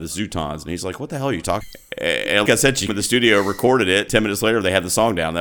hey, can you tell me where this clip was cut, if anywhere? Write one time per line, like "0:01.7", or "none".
0:01.6
0:02.5
0:02.9
0:04.1